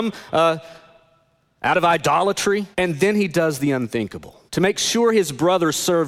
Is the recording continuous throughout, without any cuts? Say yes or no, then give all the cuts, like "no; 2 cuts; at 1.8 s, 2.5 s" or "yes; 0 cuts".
no; 2 cuts; at 2.7 s, 4.5 s